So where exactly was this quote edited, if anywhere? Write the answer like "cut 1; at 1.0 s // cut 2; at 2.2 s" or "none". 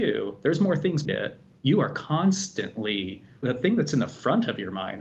cut 1; at 1.0 s // cut 2; at 3.4 s